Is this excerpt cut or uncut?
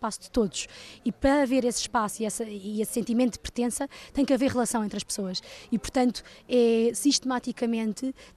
uncut